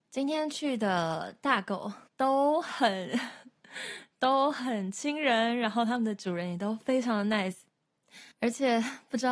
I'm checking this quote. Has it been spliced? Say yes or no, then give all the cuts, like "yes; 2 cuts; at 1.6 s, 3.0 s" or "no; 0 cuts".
yes; 2 cuts; at 2.1 s, 8.3 s